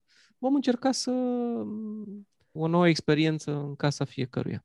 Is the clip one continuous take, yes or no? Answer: no